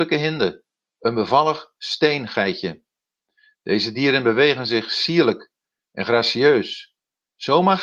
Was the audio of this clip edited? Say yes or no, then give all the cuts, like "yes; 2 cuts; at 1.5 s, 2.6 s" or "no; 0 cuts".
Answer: no; 0 cuts